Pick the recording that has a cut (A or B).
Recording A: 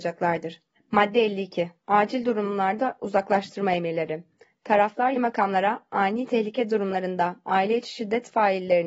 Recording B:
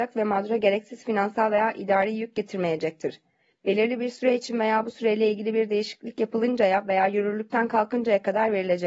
A